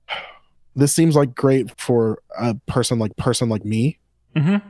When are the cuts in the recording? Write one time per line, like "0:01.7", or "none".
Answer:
0:01.7
0:03.1